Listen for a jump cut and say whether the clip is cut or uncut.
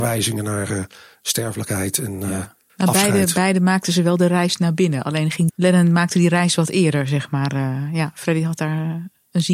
cut